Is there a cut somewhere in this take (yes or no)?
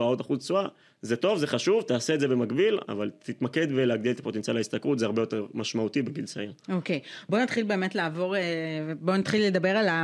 yes